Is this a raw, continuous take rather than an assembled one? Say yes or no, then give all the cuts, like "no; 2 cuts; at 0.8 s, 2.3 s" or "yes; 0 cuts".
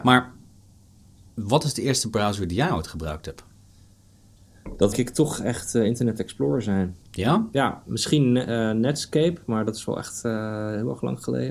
no; 2 cuts; at 4.9 s, 7.0 s